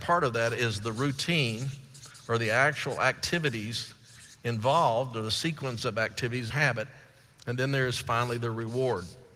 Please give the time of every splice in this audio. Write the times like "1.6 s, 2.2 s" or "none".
6.5 s